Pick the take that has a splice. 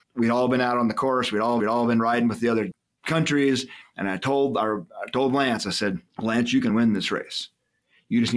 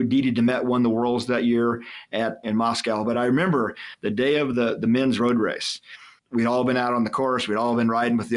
first; 2 cuts; at 1.6 s, 6.1 s

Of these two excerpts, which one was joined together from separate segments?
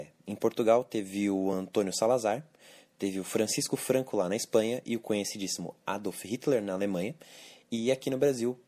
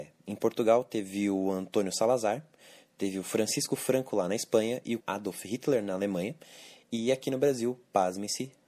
second; 1 cut; at 5.0 s

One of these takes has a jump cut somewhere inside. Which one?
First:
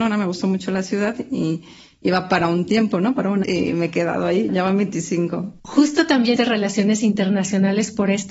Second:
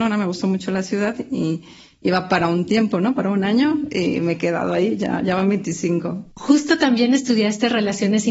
first; 3 cuts; at 3.4 s, 4.5 s, 6.4 s

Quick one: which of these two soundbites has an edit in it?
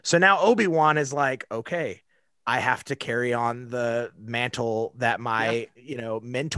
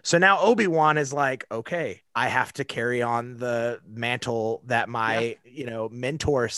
second; 1 cut; at 2.1 s

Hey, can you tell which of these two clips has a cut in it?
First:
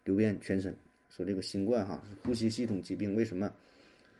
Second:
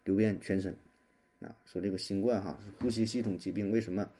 first; 1 cut; at 1.0 s

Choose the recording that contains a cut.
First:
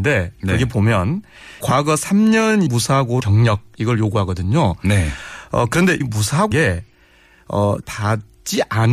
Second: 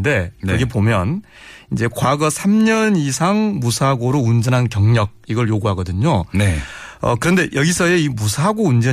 first; 6 cuts; at 1.6 s, 2.7 s, 3.2 s, 6.0 s, 6.5 s, 7.8 s

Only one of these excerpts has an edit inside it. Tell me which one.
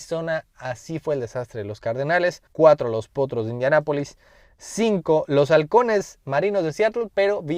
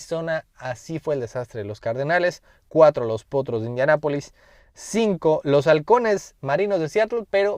first; 1 cut; at 2.5 s

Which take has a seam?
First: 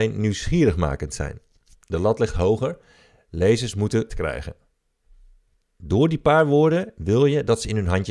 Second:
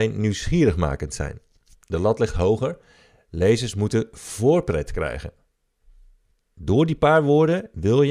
first; 1 cut; at 4.1 s

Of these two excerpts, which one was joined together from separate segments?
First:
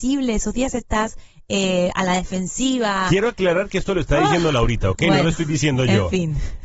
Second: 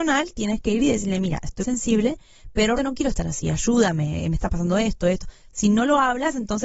second; 2 cuts; at 1.6 s, 2.8 s

